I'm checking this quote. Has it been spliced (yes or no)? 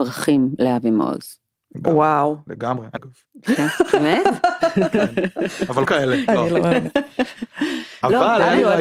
yes